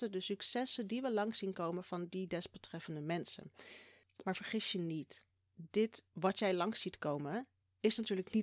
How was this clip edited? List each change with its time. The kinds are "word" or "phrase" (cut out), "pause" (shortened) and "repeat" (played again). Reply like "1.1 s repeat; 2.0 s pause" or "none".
none